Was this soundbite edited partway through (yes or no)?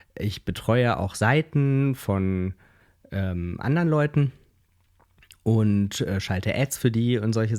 no